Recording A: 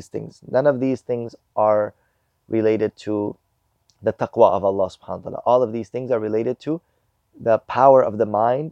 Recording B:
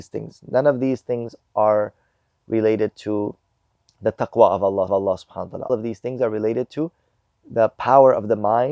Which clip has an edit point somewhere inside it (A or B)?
B